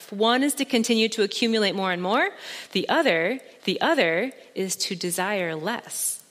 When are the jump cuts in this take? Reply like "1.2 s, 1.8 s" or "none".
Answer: 3.6 s